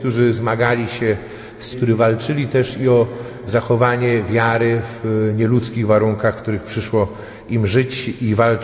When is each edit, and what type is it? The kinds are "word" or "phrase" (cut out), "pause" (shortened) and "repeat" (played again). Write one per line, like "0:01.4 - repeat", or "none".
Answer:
0:01.7 - word